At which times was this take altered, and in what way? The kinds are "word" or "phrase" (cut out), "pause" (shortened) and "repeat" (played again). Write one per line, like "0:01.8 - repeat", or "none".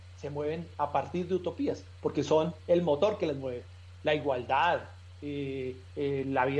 none